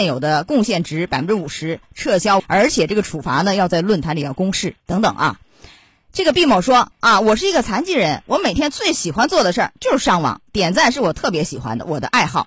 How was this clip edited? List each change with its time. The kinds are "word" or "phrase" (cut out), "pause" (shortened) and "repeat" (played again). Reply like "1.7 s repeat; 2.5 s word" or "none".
2.4 s word